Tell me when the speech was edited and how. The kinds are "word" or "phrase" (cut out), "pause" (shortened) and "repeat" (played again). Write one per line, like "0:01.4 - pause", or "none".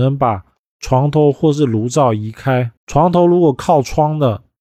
0:02.8 - pause